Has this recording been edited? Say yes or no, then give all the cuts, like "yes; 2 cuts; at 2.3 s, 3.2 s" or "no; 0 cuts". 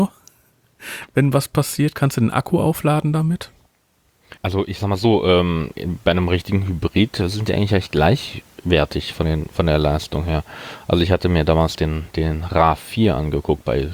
yes; 1 cut; at 4.4 s